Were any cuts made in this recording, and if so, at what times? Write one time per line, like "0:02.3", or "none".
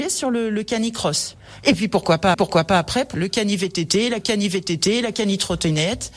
0:02.3
0:03.1
0:04.2